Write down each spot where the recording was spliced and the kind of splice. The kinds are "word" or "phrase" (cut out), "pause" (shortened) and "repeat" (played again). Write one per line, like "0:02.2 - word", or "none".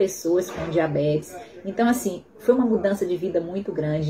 none